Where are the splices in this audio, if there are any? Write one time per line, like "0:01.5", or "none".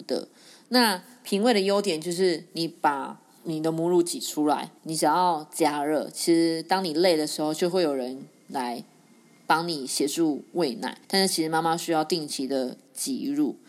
0:04.8
0:11.0